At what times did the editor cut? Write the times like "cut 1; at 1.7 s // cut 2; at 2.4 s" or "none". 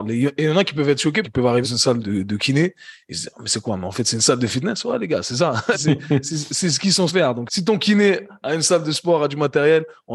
cut 1; at 1.2 s // cut 2; at 1.6 s // cut 3; at 2.0 s // cut 4; at 5.7 s // cut 5; at 7.1 s // cut 6; at 7.5 s